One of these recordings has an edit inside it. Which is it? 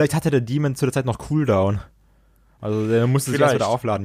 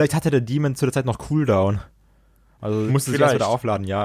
second; 1 cut; at 2.9 s

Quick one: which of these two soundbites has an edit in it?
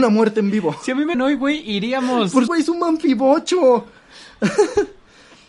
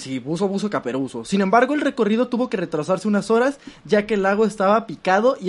first; 2 cuts; at 1.1 s, 2.5 s

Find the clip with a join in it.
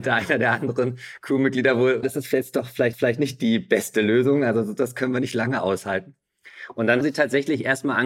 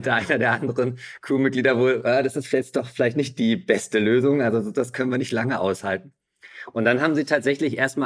first; 3 cuts; at 2.0 s, 2.9 s, 7.0 s

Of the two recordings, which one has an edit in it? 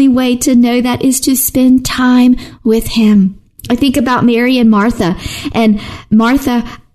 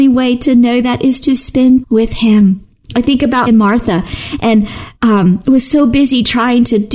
second; 3 cuts; at 1.8 s, 3.5 s, 5.0 s

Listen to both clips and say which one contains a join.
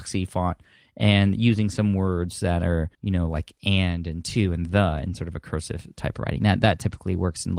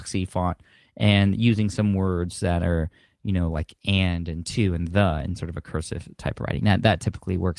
first; 1 cut; at 2.9 s

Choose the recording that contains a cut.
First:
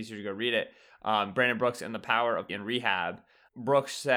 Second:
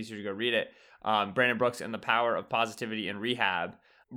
first; 1 cut; at 2.5 s

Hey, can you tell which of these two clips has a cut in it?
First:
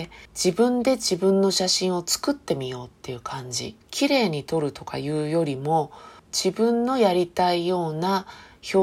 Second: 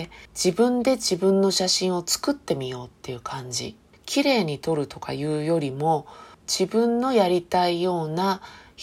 first; 1 cut; at 3.8 s

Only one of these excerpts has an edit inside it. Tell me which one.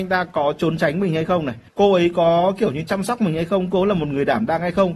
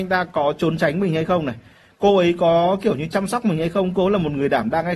first; 1 cut; at 1.7 s

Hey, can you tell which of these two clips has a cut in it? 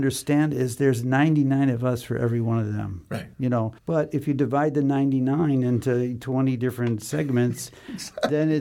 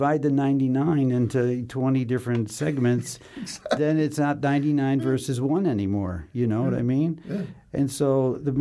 first; 2 cuts; at 3.3 s, 3.8 s

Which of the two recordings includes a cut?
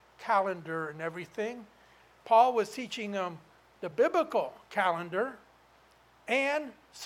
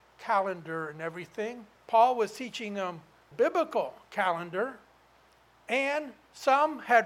second; 2 cuts; at 1.8 s, 3.3 s

